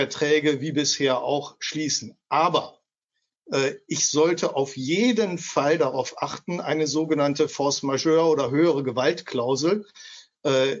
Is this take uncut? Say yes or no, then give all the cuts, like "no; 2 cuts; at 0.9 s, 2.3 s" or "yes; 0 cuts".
yes; 0 cuts